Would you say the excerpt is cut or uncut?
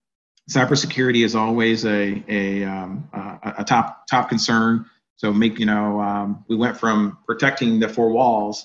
cut